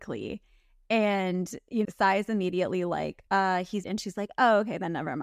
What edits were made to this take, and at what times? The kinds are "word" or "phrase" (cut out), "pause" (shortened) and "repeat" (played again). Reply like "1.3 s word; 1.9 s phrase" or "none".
1.8 s word; 3.3 s pause; 3.8 s word